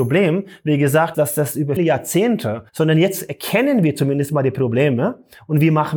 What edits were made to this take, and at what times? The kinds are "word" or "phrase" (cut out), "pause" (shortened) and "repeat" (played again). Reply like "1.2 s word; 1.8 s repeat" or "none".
1.1 s word; 1.8 s word; 2.7 s pause